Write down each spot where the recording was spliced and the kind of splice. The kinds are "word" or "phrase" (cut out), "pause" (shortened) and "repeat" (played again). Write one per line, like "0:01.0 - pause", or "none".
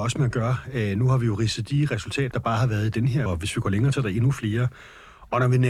0:02.3 - word
0:03.3 - word
0:03.9 - word